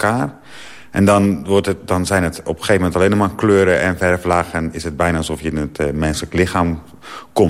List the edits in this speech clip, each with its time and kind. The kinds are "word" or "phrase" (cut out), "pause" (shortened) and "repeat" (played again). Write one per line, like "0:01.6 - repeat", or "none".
none